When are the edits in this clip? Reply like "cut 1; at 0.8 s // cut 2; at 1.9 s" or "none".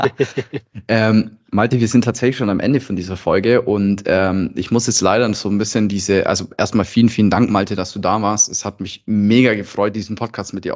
none